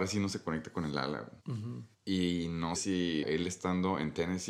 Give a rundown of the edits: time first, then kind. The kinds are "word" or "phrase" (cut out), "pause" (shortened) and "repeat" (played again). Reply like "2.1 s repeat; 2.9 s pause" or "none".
1.4 s pause; 1.9 s pause; 2.7 s word; 3.2 s phrase